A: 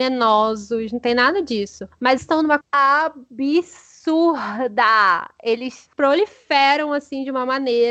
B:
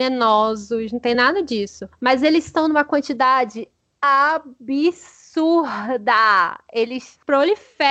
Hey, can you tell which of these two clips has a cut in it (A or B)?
A